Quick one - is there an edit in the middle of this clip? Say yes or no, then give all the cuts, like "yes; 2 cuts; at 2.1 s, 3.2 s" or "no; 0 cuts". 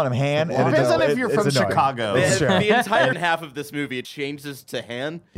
yes; 2 cuts; at 3.1 s, 4.0 s